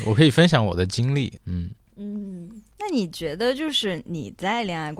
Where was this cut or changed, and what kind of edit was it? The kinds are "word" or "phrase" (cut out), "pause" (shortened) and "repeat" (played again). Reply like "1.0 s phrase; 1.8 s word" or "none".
1.4 s phrase; 2.7 s pause